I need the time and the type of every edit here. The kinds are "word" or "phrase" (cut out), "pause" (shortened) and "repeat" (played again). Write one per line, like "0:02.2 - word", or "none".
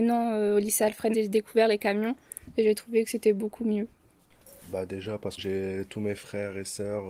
0:01.1 - word
0:05.4 - word

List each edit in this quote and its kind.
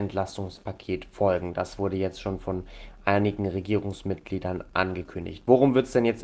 none

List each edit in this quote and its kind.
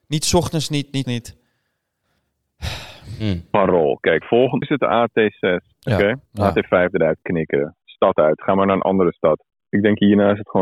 0:01.0 - word
0:04.2 - word
0:04.6 - word
0:05.7 - pause
0:06.3 - pause
0:07.8 - pause

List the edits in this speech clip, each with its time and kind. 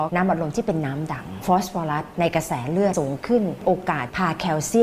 none

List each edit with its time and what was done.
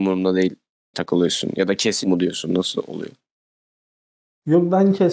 0:00.9 - word
0:02.0 - word

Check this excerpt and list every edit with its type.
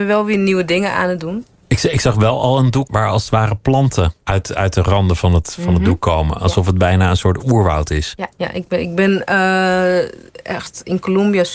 0:02.9 - word
0:04.2 - pause
0:08.3 - pause

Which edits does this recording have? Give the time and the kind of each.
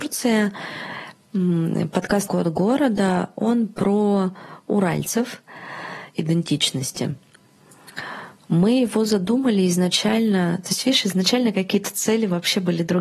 0:02.3 - word
0:06.1 - phrase

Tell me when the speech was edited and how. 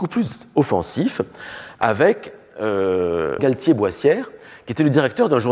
0:03.4 - word

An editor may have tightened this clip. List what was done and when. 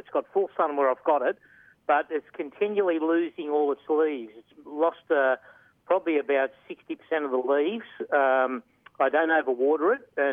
0:04.6 - pause

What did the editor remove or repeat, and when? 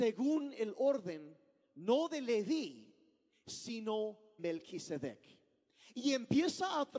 0:04.4 - word

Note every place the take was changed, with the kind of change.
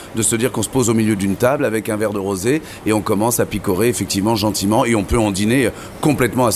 none

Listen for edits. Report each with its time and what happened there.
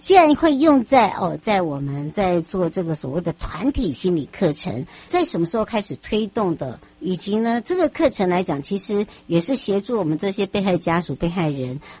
0:05.1 - word

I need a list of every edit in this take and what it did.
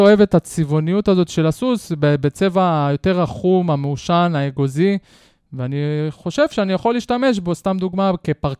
none

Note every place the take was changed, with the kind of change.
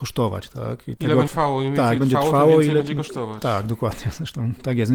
0:01.0 - word
0:01.3 - word
0:02.0 - word

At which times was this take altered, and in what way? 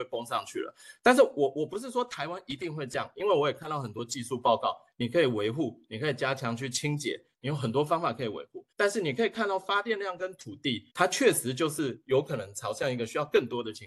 0:08.7 - pause
0:10.9 - pause

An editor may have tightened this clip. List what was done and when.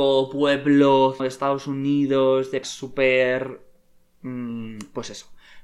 0:01.2 - word
0:02.6 - word

